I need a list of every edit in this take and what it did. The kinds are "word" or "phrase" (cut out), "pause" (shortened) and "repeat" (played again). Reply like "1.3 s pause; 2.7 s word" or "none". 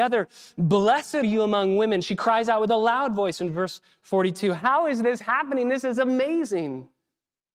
1.2 s word